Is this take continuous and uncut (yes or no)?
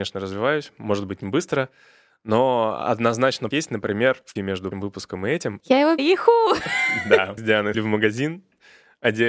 no